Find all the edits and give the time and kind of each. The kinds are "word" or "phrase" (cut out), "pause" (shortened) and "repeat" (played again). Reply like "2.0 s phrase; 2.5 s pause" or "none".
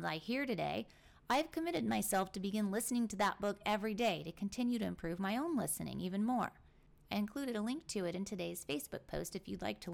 none